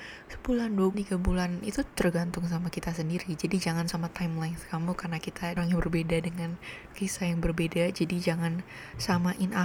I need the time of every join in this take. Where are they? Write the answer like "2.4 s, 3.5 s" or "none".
0.9 s, 1.6 s, 3.9 s, 5.6 s, 6.9 s